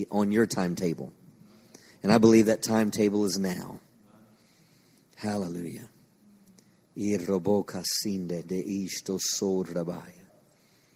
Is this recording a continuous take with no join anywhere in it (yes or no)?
yes